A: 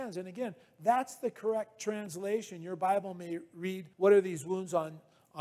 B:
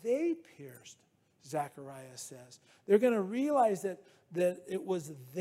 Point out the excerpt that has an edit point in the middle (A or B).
A